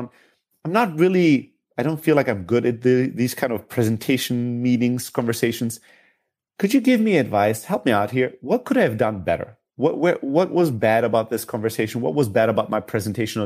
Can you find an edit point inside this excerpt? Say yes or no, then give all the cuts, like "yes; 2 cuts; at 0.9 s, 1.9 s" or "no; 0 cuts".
no; 0 cuts